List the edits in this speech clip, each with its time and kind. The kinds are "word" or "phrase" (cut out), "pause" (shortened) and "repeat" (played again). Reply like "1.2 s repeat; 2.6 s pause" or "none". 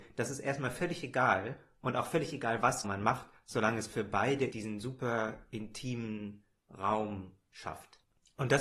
2.8 s word; 4.5 s word